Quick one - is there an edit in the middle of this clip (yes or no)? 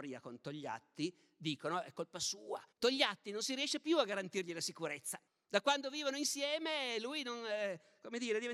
yes